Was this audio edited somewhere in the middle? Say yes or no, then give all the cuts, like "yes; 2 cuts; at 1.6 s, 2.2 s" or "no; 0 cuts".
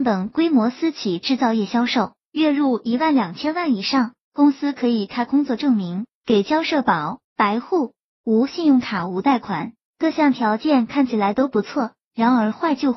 yes; 1 cut; at 7.2 s